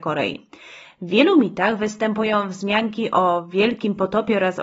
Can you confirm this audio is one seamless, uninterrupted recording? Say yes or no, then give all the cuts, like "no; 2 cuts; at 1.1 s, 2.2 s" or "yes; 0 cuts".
yes; 0 cuts